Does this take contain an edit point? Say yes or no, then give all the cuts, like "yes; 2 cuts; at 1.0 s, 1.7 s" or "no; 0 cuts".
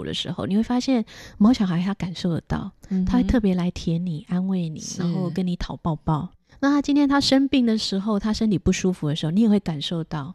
no; 0 cuts